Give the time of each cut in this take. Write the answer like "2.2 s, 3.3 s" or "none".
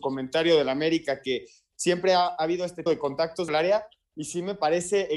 2.9 s, 3.5 s